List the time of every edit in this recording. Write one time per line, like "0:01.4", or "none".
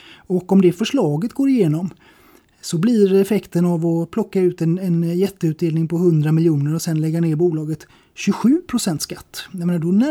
none

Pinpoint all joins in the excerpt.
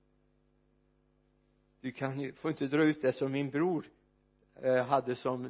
none

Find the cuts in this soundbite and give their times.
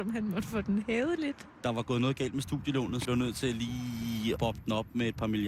0:03.0
0:04.4

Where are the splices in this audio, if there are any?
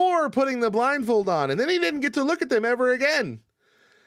none

